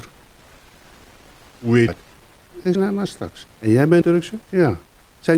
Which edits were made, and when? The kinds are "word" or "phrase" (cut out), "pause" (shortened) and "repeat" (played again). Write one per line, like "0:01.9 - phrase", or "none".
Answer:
0:01.9 - word
0:02.7 - word
0:03.6 - pause
0:04.0 - word
0:04.4 - pause